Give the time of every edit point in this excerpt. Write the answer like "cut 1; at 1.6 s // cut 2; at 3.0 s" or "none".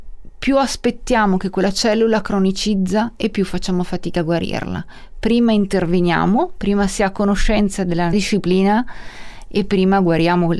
cut 1; at 8.1 s